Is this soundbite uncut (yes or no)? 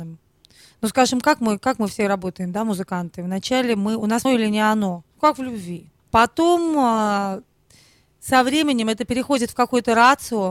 no